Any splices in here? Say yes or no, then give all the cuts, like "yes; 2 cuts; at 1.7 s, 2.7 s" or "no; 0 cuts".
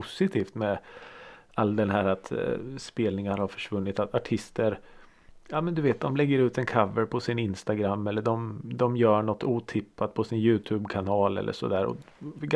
no; 0 cuts